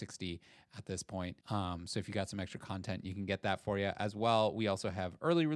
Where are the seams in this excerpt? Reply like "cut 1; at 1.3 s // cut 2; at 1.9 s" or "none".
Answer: cut 1; at 1.4 s